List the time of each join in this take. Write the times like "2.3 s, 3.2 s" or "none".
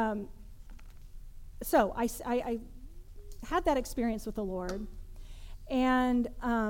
none